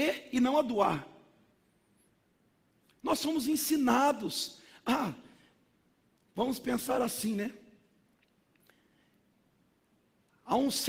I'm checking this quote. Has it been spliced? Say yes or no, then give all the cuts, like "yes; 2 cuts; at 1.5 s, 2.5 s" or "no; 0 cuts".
no; 0 cuts